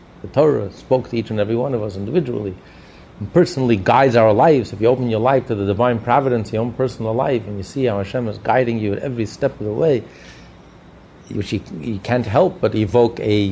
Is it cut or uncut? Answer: uncut